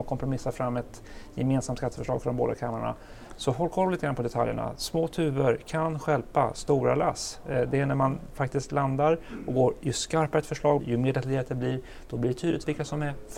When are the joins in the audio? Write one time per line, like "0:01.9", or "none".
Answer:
0:10.8